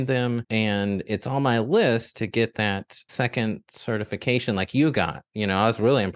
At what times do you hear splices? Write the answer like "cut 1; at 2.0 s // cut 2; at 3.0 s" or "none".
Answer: none